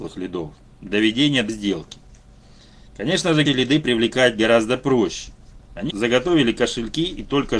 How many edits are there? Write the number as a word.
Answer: four